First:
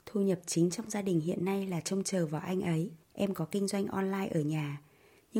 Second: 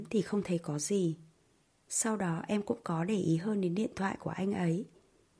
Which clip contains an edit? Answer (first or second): first